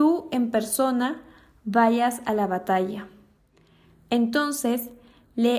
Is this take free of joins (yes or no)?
yes